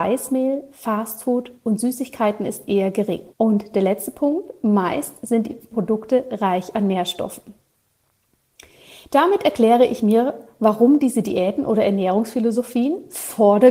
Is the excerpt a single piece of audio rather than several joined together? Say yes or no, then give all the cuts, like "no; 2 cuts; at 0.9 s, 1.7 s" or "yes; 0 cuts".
no; 2 cuts; at 3.3 s, 5.7 s